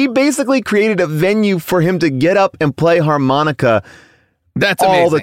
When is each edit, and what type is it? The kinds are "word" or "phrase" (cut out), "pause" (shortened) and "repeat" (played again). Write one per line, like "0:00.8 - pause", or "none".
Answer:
none